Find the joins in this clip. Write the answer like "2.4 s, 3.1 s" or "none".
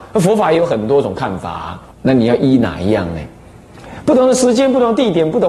1.9 s